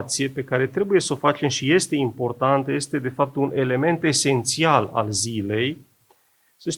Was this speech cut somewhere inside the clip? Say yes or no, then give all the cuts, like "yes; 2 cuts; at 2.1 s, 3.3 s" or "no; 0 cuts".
no; 0 cuts